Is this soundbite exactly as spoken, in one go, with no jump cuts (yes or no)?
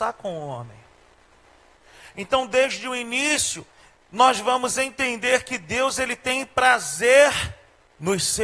yes